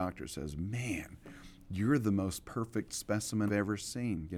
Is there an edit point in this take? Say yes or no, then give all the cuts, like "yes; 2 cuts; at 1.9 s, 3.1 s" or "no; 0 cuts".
yes; 1 cut; at 3.5 s